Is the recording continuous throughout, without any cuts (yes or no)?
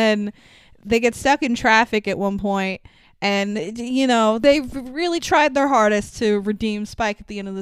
yes